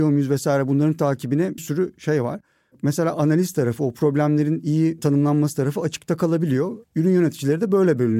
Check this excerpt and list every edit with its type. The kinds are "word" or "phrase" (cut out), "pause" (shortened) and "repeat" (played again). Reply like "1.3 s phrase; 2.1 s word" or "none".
1.6 s word